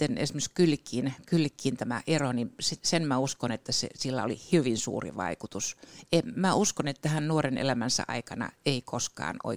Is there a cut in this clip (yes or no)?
no